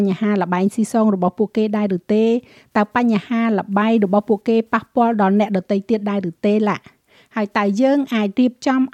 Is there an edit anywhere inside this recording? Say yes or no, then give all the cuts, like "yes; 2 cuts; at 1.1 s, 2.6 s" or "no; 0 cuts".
no; 0 cuts